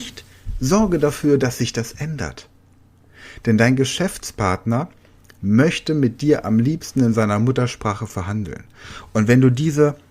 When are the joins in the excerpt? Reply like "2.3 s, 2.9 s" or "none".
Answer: none